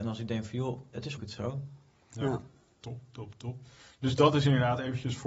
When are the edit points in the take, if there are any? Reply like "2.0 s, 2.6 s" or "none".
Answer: 1.2 s